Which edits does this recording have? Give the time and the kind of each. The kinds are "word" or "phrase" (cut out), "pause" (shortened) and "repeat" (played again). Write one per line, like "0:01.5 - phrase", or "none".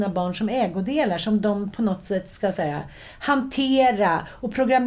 none